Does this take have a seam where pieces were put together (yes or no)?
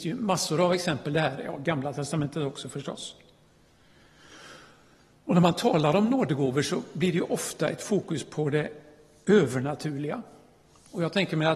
no